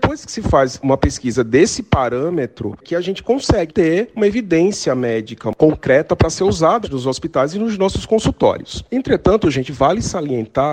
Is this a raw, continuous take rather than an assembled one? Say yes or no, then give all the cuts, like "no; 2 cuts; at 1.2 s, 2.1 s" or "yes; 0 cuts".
no; 3 cuts; at 2.8 s, 3.7 s, 6.8 s